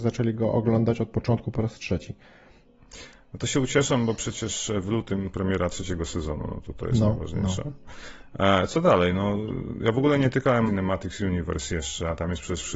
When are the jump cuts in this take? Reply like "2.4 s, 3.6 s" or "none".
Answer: 10.7 s